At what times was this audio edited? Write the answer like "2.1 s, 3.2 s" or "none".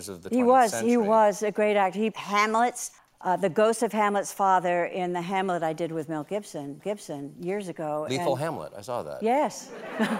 2.1 s, 3.0 s, 6.8 s